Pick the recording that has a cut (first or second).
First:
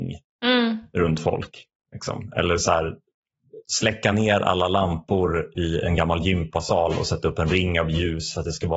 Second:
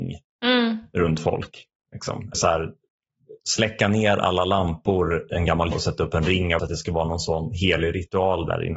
second